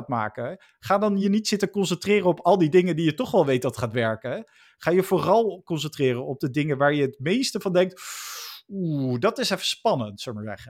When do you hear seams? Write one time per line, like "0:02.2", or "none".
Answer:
none